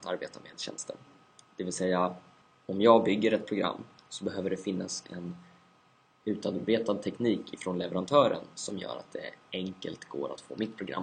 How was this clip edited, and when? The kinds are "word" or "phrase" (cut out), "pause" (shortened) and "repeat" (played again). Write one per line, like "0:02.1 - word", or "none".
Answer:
none